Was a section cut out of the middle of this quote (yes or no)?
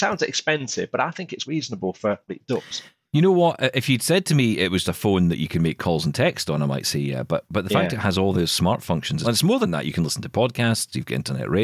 yes